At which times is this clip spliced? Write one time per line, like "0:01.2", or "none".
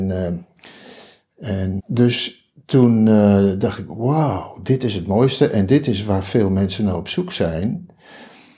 0:01.8